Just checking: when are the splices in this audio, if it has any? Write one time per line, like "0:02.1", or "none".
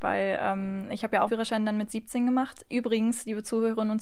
0:01.3